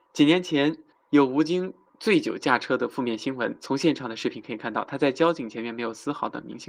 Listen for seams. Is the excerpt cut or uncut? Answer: cut